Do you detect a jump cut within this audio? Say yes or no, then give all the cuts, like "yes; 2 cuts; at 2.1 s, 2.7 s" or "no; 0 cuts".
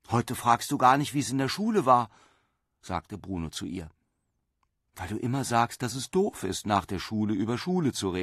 no; 0 cuts